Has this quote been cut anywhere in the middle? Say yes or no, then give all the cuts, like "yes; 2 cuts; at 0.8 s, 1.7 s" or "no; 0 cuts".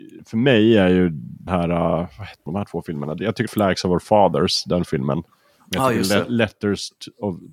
yes; 3 cuts; at 1.5 s, 2.5 s, 3.5 s